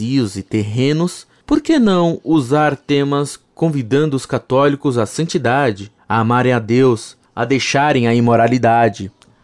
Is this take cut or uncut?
uncut